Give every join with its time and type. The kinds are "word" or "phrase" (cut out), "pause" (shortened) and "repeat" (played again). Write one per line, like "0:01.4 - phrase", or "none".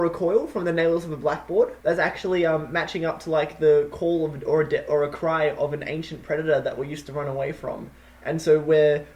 0:01.8 - pause